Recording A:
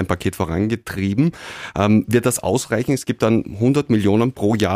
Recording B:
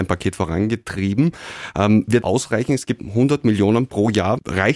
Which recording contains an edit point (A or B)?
B